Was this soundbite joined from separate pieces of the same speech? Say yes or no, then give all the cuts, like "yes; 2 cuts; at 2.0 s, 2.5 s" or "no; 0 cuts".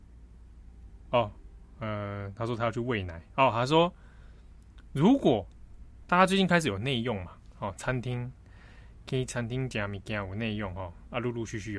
no; 0 cuts